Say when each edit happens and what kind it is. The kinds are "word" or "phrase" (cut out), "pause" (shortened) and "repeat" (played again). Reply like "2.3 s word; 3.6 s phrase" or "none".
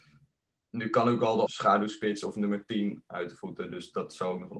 1.5 s phrase